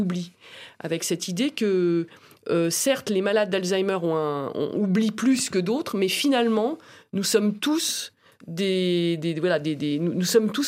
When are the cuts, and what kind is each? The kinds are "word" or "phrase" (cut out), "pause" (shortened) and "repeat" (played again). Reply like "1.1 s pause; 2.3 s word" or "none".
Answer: none